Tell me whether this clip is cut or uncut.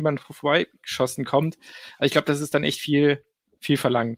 uncut